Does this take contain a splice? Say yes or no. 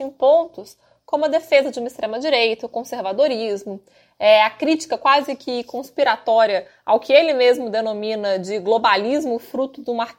no